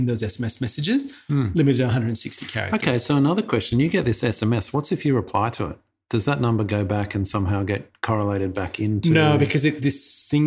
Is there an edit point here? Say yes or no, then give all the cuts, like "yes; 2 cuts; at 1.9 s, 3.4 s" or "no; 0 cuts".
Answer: no; 0 cuts